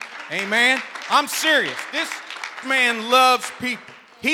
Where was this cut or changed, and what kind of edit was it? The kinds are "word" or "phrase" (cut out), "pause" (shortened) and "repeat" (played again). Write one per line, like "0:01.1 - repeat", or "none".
0:02.6 - word

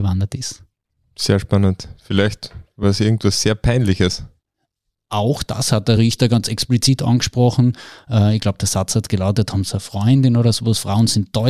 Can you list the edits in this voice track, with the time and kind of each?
none

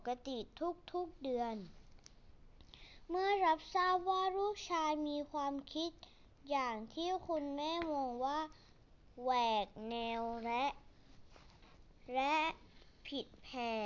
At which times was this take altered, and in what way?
none

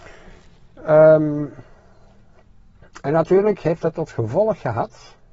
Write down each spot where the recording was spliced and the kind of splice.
none

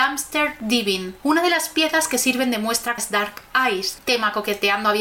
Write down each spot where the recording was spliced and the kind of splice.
0:03.0 - word

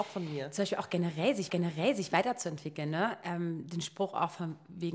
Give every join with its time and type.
0:01.5 - repeat

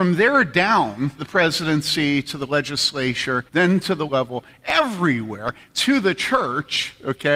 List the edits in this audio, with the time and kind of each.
0:01.2 - word
0:03.5 - pause
0:04.1 - phrase

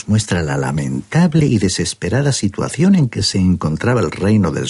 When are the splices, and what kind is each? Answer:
none

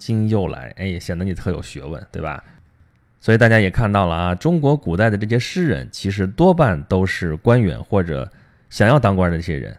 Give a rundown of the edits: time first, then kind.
none

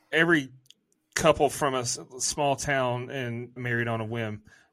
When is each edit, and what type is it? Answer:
0:03.6 - phrase

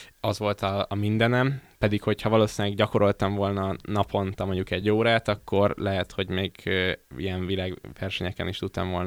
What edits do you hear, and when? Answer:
none

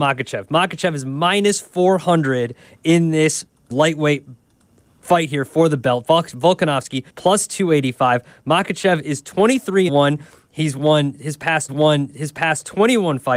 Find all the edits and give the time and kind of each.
0:03.7 - word
0:07.1 - pause
0:09.9 - word
0:11.7 - repeat

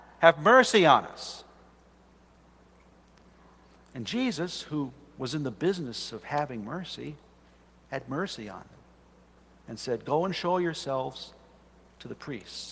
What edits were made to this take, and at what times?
none

